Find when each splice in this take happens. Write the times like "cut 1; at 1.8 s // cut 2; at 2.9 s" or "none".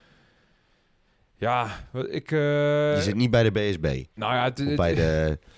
cut 1; at 4.1 s